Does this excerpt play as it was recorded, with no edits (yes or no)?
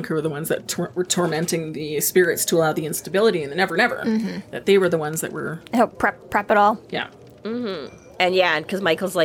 yes